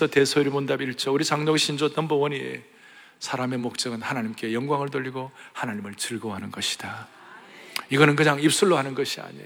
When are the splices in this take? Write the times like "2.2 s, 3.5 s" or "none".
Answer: none